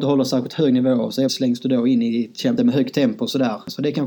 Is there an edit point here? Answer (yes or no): yes